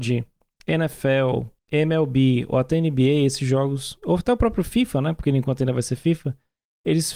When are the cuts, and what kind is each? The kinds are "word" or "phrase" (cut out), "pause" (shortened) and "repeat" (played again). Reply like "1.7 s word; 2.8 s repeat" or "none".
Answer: 1.6 s pause